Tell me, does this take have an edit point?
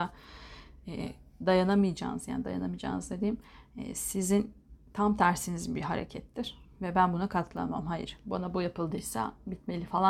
no; 0 cuts

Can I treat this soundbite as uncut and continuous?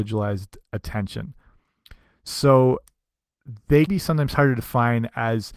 no; 1 cut; at 3.9 s

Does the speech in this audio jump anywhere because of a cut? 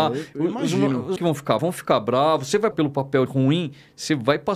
yes; 4 cuts; at 1.2 s, 1.6 s, 2.7 s, 3.3 s

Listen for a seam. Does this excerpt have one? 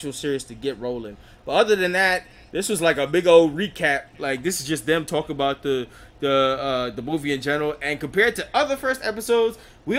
no; 0 cuts

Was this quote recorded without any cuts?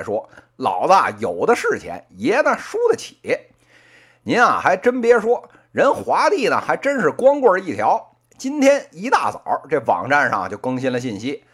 yes; 0 cuts

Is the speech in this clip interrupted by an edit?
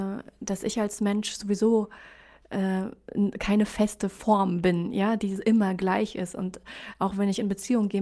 no; 0 cuts

